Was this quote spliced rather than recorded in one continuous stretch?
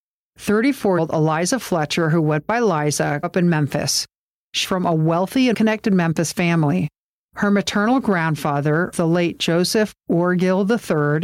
yes; 5 cuts; at 1.0 s, 3.2 s, 4.6 s, 5.5 s, 8.9 s

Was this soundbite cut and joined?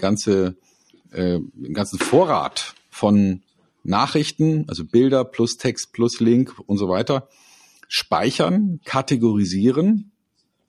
no; 0 cuts

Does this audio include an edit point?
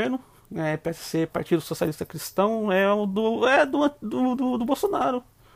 no; 0 cuts

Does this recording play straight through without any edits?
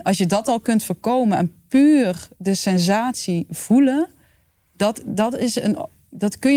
yes; 0 cuts

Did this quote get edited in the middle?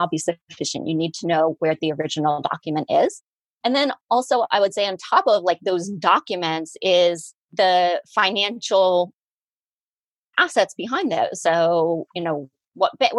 no; 0 cuts

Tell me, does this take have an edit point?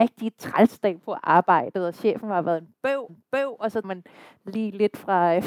yes; 2 cuts; at 3.1 s, 3.8 s

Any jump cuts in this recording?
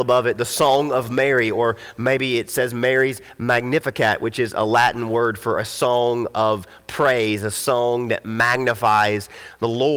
no; 0 cuts

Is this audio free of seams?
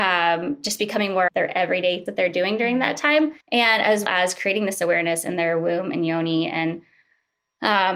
no; 4 cuts; at 1.3 s, 2.1 s, 3.4 s, 4.1 s

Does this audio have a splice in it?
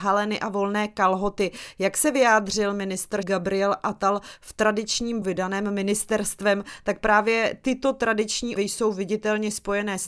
yes; 3 cuts; at 3.2 s, 5.2 s, 8.6 s

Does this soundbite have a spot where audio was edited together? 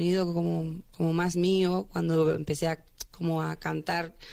no; 0 cuts

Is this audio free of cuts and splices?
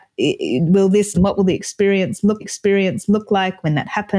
no; 2 cuts; at 1.1 s, 2.4 s

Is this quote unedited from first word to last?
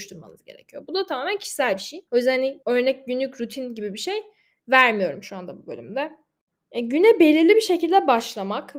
no; 2 cuts; at 2.1 s, 2.6 s

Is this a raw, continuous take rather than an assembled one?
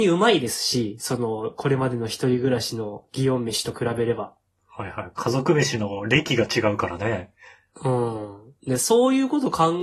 yes; 0 cuts

